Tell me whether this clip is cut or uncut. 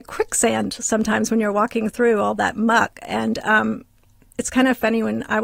uncut